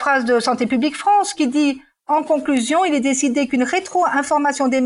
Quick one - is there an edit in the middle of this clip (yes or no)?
no